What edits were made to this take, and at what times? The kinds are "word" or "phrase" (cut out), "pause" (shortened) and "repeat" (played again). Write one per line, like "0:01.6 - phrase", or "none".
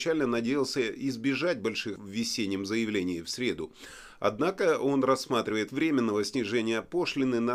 0:02.0 - word
0:05.7 - word